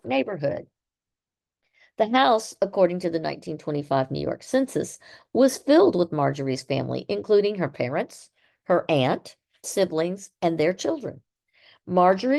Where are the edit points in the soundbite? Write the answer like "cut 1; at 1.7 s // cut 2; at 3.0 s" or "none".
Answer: cut 1; at 9.6 s